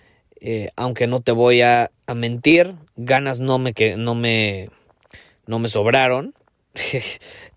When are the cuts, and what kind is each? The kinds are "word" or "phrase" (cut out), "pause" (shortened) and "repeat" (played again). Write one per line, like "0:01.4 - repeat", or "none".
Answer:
none